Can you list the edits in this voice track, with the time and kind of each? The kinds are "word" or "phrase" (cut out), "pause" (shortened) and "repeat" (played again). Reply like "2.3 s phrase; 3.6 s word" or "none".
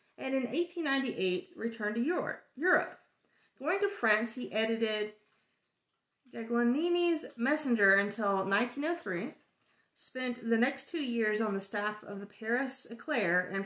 none

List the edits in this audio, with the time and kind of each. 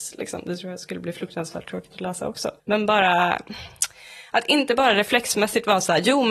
2.6 s pause

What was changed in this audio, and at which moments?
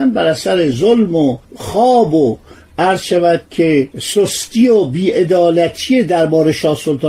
1.4 s pause; 3.9 s pause

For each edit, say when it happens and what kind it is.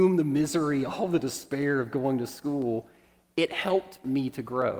none

